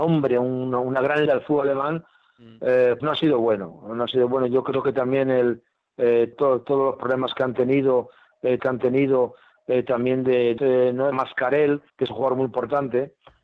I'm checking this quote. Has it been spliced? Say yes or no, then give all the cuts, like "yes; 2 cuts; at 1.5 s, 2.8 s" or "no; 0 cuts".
yes; 7 cuts; at 1.3 s, 3.0 s, 6.3 s, 8.6 s, 10.6 s, 11.1 s, 11.9 s